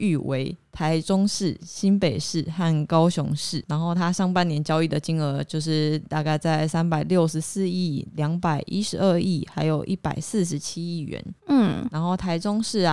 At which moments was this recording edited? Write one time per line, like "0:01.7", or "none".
0:11.4

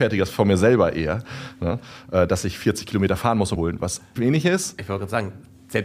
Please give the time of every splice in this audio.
0:03.5
0:04.2

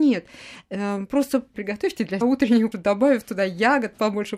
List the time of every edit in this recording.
0:01.5
0:02.2
0:02.7

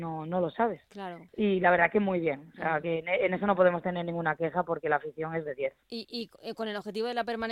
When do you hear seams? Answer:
0:01.3
0:05.8

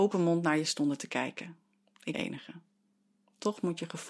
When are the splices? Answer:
0:02.1

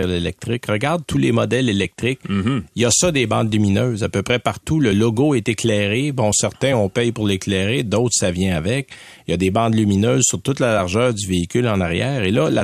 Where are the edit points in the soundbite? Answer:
none

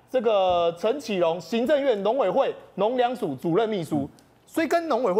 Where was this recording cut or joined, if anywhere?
none

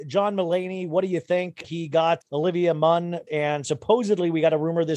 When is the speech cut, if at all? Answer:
0:01.6
0:02.2
0:03.3

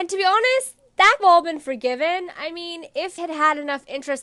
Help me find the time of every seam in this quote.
0:01.2
0:03.2

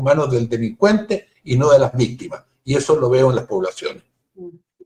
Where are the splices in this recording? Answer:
none

